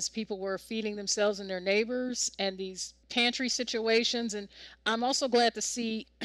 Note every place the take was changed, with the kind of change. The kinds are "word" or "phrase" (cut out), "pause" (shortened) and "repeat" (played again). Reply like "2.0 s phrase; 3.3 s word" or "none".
3.0 s pause